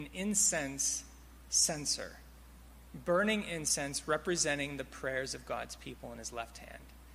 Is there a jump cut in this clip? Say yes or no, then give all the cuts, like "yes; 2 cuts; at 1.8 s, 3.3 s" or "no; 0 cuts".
no; 0 cuts